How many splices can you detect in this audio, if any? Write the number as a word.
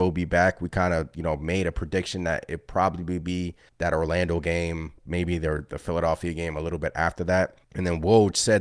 three